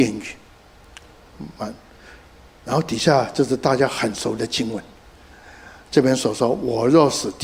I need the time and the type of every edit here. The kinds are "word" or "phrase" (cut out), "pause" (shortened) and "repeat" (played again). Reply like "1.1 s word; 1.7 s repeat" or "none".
none